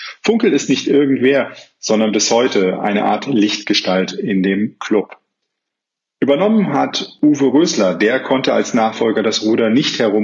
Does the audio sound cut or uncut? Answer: uncut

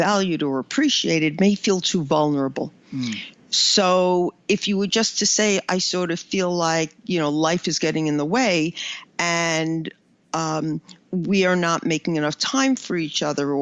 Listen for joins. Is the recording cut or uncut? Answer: uncut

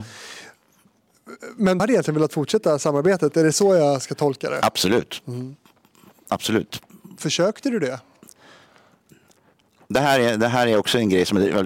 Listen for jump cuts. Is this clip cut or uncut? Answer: cut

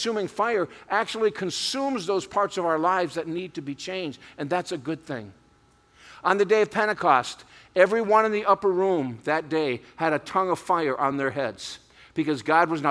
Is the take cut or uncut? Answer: uncut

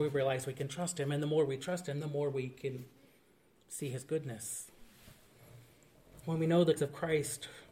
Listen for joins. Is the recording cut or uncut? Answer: cut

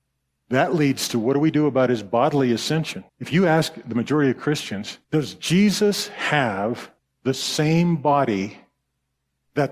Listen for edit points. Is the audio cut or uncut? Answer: cut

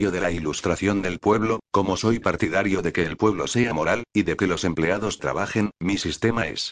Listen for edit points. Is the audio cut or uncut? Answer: uncut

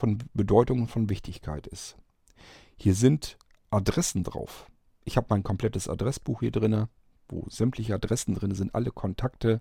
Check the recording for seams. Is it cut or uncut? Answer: uncut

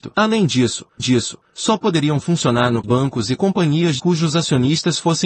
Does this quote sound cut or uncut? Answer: cut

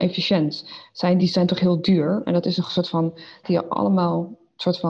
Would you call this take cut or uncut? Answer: cut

